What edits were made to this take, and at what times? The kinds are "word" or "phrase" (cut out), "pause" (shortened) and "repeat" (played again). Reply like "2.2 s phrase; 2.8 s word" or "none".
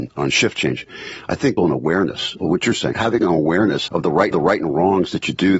1.6 s phrase; 2.4 s word; 2.9 s word; 3.9 s word; 4.3 s repeat